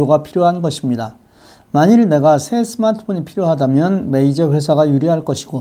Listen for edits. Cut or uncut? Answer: uncut